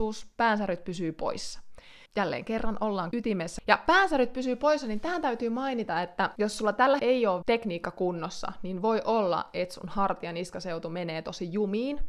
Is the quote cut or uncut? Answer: cut